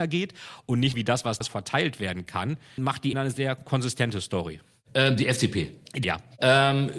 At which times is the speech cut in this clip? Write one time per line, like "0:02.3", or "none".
0:00.9
0:01.4
0:02.8
0:03.1
0:06.0